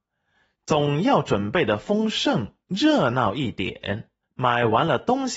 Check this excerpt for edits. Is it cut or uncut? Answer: cut